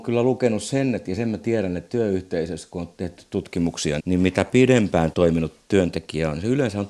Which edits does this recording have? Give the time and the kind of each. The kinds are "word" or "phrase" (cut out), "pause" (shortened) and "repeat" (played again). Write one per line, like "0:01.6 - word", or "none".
0:04.0 - word
0:05.1 - word